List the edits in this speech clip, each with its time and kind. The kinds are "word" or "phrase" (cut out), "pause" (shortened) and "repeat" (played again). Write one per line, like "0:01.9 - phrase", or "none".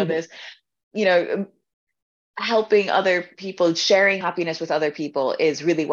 0:04.2 - word